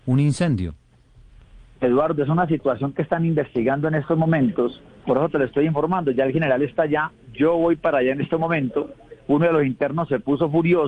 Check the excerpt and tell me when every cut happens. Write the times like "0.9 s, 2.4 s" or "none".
4.9 s

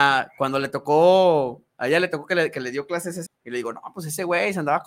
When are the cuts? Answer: 3.3 s

